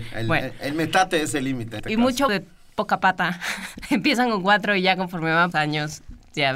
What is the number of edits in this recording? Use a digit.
3